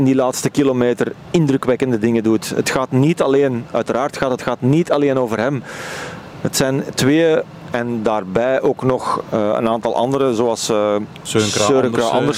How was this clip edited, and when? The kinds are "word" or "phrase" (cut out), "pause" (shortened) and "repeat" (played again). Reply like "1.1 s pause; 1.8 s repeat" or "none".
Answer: 4.4 s phrase